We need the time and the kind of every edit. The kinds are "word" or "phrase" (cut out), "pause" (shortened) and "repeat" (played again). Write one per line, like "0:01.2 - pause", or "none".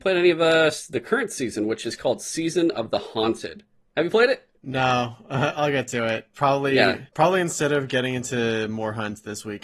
0:04.6 - pause
0:06.3 - pause
0:07.1 - pause